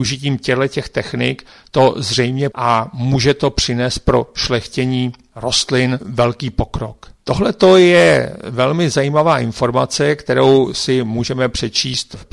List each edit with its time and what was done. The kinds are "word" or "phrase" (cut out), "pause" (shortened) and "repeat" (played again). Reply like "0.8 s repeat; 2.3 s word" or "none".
2.5 s word; 7.2 s pause